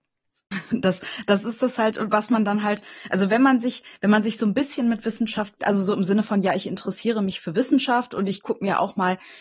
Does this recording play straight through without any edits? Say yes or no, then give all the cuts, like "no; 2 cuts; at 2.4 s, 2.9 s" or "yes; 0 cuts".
no; 1 cut; at 5.6 s